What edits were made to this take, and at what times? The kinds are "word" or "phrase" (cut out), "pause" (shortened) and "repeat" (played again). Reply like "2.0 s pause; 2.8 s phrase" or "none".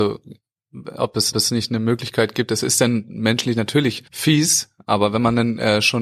1.3 s repeat; 4.1 s pause

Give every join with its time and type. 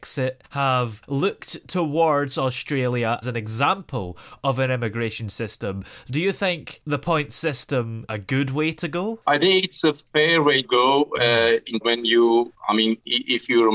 3.2 s word; 8.1 s word; 10.6 s word; 11.8 s word

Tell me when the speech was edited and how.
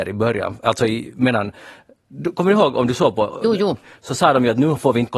none

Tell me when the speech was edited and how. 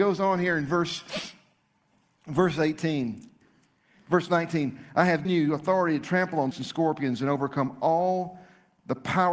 5.2 s word; 6.5 s word

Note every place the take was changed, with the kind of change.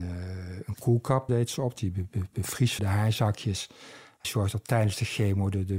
1.3 s word; 2.8 s word; 4.2 s word

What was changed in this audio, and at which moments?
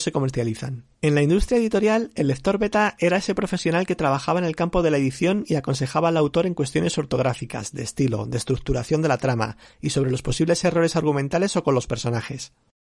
0.9 s pause

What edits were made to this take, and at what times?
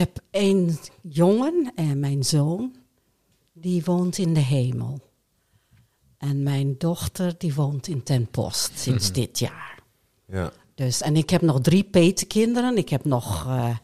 none

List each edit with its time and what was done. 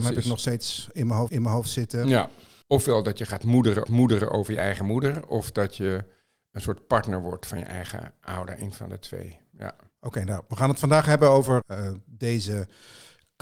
1.3 s repeat; 3.8 s repeat; 11.6 s word

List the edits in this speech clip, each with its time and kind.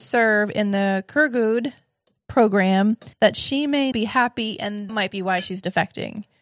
3.1 s pause; 3.9 s word; 4.9 s word

